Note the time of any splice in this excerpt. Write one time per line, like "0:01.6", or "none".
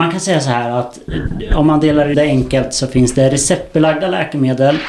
0:02.1

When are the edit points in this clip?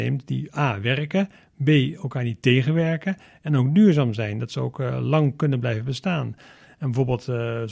none

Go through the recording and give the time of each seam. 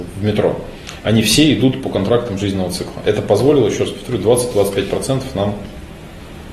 none

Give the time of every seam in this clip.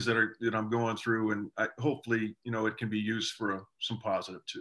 none

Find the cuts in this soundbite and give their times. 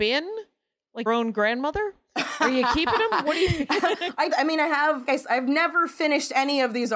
0:01.1
0:04.3
0:05.1

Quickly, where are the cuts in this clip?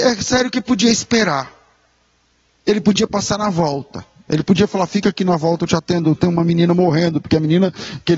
none

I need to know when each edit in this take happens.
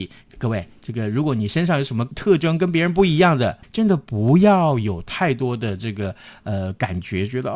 0:03.6

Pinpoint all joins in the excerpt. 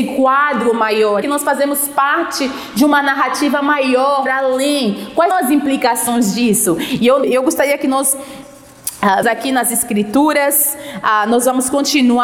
0:01.2
0:04.3
0:05.3
0:07.2
0:09.2

